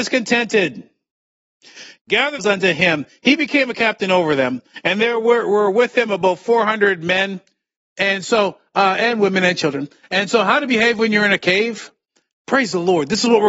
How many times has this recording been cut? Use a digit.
1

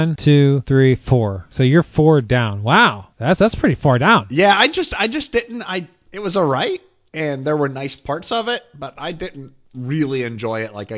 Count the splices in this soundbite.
0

